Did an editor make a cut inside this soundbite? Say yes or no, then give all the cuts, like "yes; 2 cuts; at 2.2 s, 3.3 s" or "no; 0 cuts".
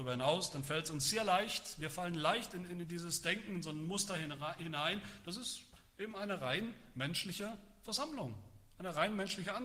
no; 0 cuts